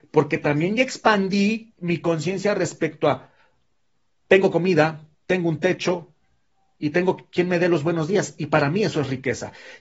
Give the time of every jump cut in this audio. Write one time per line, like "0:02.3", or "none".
0:05.1